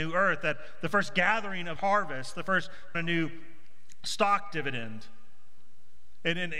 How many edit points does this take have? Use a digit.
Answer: 2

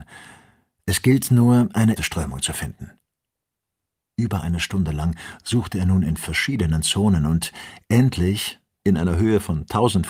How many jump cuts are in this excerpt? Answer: 1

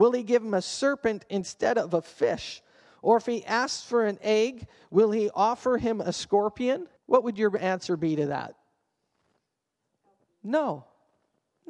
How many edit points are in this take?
1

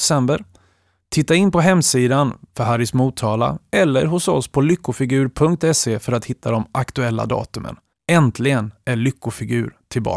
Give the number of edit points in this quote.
1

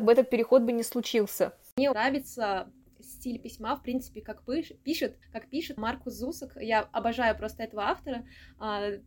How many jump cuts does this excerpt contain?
3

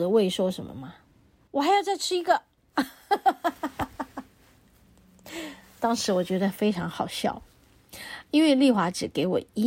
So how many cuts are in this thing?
1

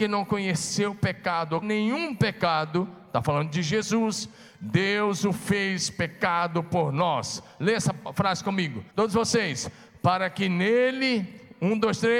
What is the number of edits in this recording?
2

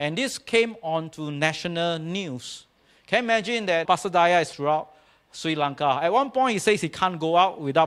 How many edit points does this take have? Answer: 2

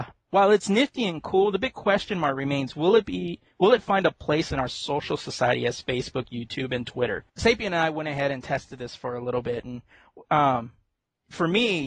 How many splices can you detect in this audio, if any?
1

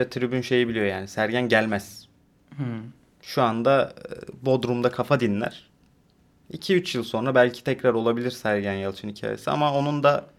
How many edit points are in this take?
0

